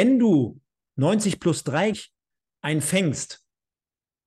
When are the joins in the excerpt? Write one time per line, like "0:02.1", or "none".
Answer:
0:01.9